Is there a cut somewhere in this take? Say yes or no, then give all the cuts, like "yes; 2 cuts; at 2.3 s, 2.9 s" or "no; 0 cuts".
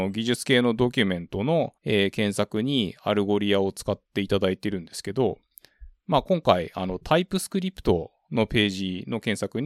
yes; 1 cut; at 1.8 s